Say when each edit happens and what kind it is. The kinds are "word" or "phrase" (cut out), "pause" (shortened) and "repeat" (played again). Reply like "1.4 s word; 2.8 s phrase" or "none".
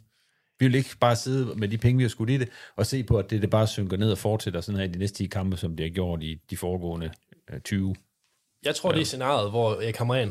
none